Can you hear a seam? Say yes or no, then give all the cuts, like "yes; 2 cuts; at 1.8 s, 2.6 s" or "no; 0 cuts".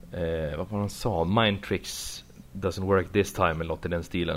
no; 0 cuts